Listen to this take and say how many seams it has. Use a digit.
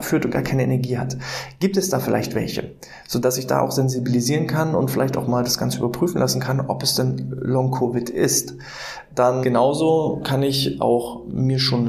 1